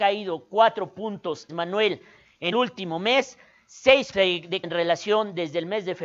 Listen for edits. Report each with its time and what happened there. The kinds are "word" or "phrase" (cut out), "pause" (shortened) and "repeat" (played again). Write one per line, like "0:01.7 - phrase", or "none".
0:01.5 - word
0:02.5 - word
0:04.1 - word
0:04.6 - word